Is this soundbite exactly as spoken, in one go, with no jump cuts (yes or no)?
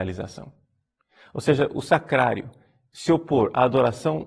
yes